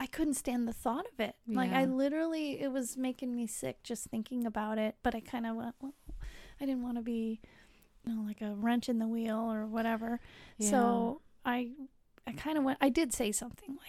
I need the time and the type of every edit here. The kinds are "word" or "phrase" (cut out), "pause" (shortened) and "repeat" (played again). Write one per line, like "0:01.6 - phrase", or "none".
none

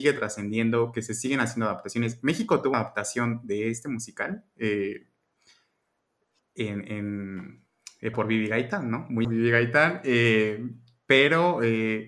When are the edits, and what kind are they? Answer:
0:02.7 - word
0:08.1 - word
0:09.2 - word

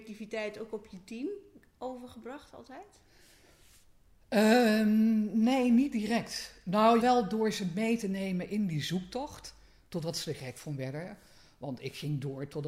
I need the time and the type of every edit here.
0:07.0 - word

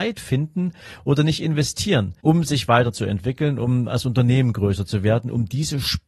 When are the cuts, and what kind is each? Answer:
0:02.2 - pause

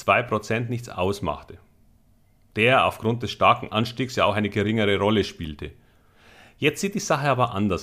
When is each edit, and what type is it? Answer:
none

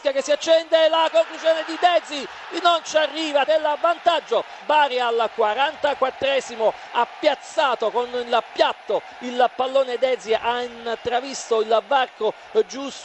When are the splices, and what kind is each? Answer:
0:03.5 - phrase
0:04.6 - word

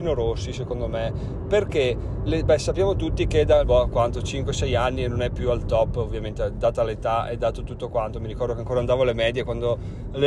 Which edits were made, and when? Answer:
0:02.3 - word
0:03.6 - word

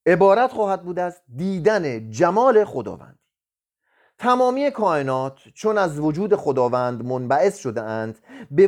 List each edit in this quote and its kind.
none

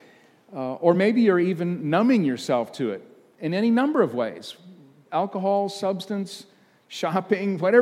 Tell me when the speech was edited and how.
none

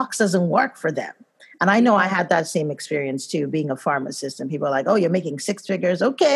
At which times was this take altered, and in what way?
none

